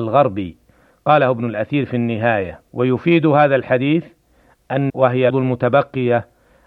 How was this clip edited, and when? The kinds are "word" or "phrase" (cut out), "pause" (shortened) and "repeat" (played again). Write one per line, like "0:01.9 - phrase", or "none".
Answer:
0:02.7 - pause
0:04.9 - word
0:05.3 - word